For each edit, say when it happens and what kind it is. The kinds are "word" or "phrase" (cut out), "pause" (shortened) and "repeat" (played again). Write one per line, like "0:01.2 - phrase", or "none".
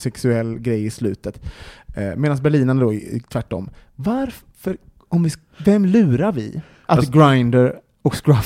none